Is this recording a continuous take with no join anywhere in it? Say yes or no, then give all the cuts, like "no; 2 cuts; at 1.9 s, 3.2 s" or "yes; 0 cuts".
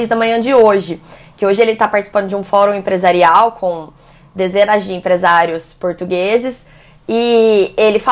yes; 0 cuts